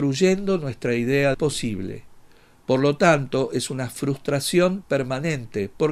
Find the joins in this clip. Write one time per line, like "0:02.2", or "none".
0:01.3